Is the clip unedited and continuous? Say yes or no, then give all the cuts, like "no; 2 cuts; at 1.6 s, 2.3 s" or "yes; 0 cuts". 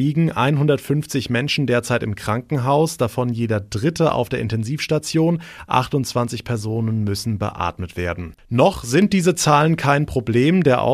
yes; 0 cuts